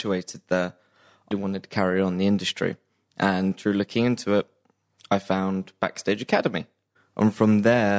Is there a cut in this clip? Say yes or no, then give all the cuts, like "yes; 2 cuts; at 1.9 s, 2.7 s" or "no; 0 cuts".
yes; 1 cut; at 1.3 s